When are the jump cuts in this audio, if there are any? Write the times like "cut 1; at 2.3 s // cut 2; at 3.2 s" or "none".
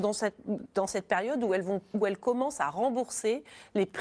none